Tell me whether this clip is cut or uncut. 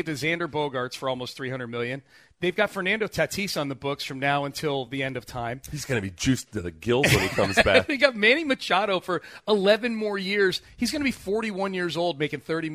uncut